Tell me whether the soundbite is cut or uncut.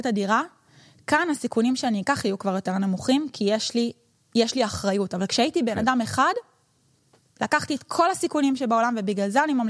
uncut